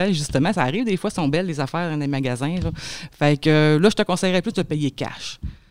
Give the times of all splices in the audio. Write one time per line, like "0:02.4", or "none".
none